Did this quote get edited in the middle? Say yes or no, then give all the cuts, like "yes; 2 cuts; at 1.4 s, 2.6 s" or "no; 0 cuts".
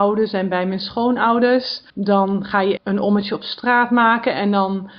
yes; 2 cuts; at 1.9 s, 2.8 s